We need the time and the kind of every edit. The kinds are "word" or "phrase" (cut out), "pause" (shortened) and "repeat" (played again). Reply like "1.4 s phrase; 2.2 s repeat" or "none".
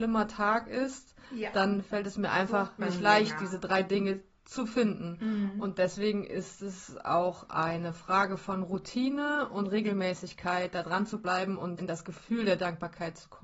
11.8 s word